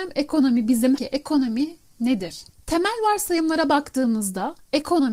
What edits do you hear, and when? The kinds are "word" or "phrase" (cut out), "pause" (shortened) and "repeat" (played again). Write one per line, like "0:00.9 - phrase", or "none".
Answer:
0:01.0 - phrase